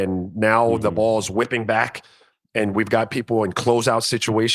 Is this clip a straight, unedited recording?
yes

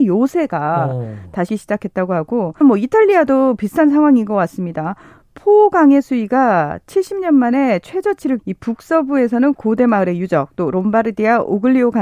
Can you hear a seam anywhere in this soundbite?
yes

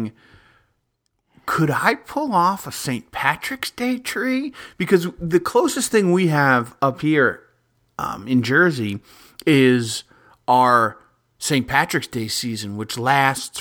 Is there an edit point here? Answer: no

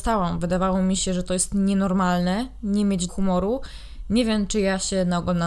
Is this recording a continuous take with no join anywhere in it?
no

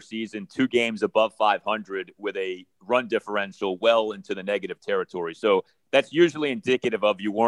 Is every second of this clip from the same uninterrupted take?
yes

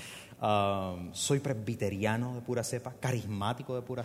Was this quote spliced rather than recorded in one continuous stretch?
no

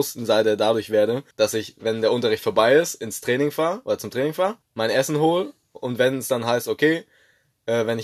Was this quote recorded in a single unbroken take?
no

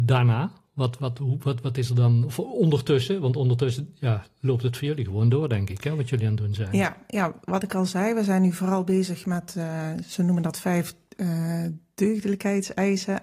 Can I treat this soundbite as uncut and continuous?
yes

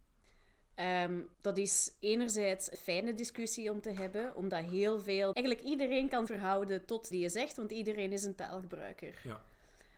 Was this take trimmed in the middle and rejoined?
yes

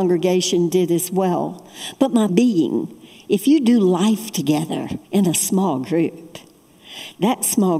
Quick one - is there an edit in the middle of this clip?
yes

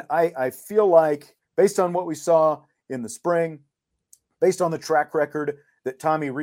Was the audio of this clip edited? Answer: yes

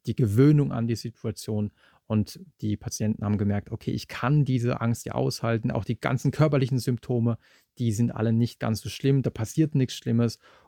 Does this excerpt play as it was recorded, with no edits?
yes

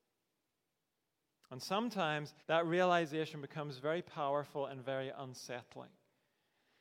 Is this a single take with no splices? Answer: no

